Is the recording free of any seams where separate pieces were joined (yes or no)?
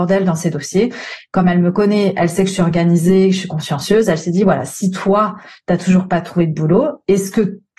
yes